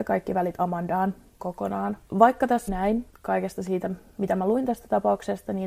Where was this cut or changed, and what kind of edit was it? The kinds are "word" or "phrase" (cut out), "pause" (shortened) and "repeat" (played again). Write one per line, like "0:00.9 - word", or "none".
0:01.4 - word
0:02.1 - pause
0:02.7 - word
0:03.1 - phrase